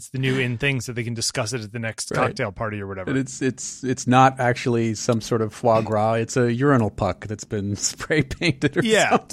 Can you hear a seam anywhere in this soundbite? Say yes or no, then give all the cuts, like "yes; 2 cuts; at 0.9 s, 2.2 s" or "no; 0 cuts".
no; 0 cuts